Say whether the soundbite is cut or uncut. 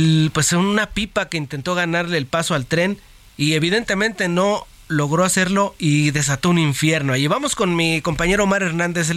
uncut